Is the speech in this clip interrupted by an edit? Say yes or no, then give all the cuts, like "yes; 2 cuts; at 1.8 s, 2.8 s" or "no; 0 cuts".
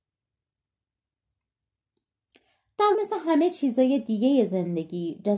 yes; 1 cut; at 2.9 s